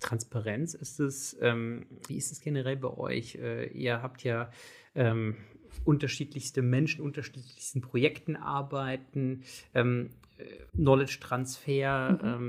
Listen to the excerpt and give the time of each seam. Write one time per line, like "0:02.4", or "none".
0:02.1
0:07.0
0:10.7